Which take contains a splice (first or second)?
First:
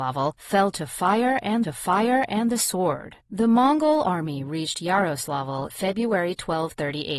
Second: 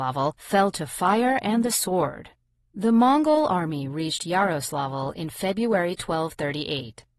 first